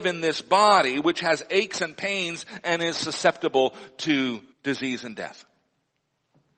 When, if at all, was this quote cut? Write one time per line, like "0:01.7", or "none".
0:04.5